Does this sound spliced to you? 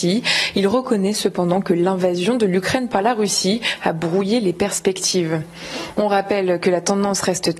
no; 0 cuts

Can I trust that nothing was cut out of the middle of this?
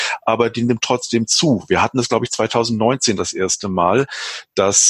yes; 0 cuts

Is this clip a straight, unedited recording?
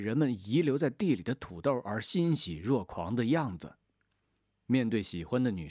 yes; 0 cuts

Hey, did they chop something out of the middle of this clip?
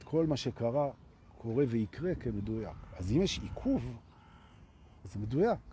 no; 0 cuts

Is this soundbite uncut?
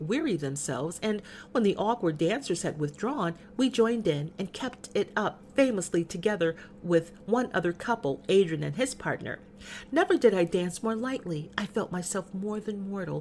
yes; 0 cuts

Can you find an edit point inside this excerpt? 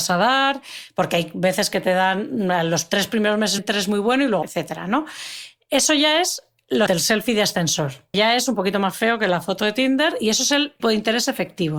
yes; 5 cuts; at 3.6 s, 4.4 s, 6.9 s, 8.1 s, 10.8 s

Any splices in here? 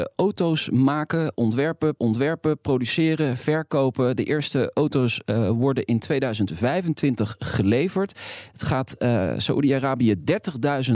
yes; 1 cut; at 2.0 s

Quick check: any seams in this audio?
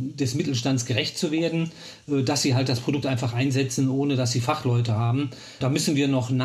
no; 0 cuts

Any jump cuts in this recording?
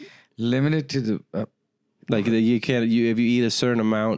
no; 0 cuts

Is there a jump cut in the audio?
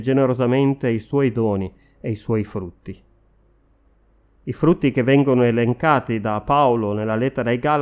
no; 0 cuts

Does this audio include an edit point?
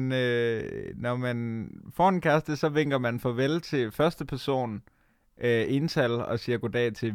no; 0 cuts

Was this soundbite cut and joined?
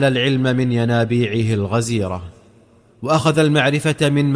no; 0 cuts

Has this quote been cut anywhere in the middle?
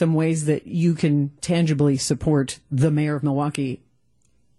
no; 0 cuts

